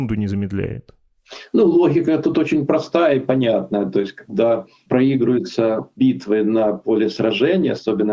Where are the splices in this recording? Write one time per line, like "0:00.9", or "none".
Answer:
none